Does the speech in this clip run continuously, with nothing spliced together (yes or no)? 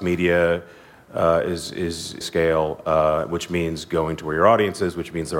no